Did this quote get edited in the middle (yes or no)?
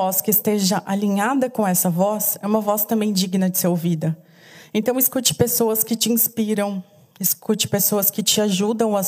no